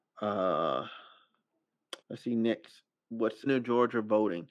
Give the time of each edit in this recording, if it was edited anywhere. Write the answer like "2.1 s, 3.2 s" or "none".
2.0 s, 3.5 s